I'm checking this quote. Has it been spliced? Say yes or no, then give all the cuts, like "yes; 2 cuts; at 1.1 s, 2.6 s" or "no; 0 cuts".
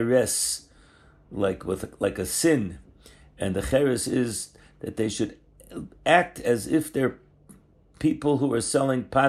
no; 0 cuts